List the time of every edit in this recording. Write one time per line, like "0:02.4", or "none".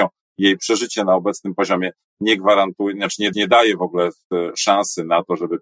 0:03.3